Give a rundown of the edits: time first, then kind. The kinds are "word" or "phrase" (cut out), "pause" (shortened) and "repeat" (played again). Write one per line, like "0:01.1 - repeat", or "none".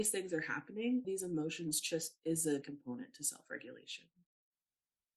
0:01.0 - phrase
0:02.2 - phrase
0:02.6 - word